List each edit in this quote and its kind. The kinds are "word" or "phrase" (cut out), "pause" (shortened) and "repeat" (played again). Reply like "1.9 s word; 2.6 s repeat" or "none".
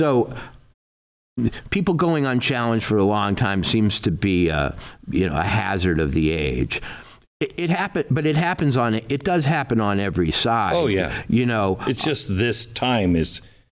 none